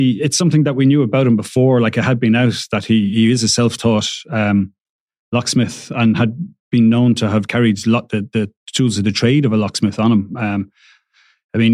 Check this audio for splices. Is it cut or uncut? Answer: uncut